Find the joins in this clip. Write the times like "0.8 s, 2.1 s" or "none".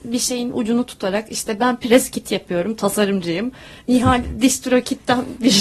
none